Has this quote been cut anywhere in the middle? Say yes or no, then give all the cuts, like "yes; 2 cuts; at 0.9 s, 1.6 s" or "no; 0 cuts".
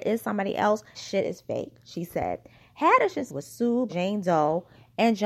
yes; 3 cuts; at 0.9 s, 3.3 s, 3.9 s